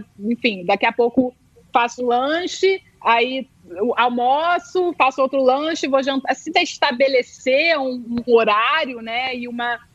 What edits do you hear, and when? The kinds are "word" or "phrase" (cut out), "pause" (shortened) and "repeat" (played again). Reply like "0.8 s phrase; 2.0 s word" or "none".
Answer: 2.0 s word; 6.5 s word; 8.3 s word